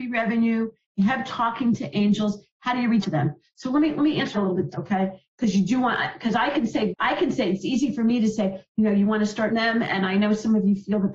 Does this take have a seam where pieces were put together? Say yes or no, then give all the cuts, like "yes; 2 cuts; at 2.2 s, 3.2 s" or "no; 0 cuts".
yes; 6 cuts; at 1.3 s, 3.0 s, 4.3 s, 4.7 s, 6.9 s, 9.5 s